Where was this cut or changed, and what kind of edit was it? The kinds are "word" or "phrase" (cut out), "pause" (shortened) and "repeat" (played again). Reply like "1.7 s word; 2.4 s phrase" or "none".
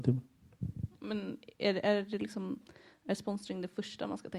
none